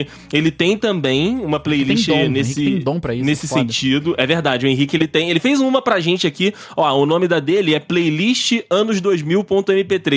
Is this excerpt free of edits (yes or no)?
yes